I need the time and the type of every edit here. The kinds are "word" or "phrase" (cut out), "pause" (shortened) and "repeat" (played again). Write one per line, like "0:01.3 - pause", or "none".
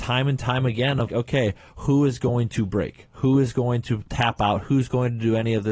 0:01.1 - word